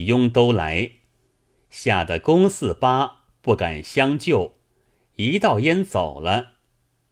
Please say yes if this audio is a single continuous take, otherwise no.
yes